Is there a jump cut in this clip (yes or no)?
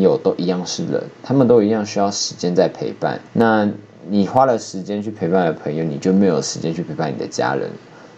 yes